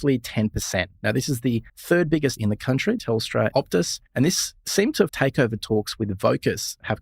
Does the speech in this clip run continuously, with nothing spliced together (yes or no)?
no